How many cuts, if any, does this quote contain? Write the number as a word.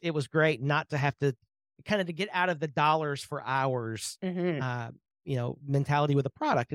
zero